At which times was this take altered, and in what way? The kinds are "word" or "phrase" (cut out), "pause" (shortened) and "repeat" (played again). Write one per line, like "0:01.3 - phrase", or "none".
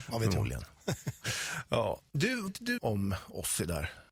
0:02.5 - word
0:02.8 - phrase